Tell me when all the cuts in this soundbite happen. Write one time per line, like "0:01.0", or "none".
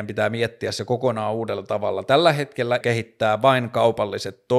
0:02.8